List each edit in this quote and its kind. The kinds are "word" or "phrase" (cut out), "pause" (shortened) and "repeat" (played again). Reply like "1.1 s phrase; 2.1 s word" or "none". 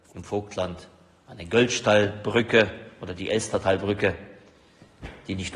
none